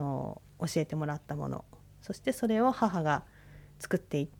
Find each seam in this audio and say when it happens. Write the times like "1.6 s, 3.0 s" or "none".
none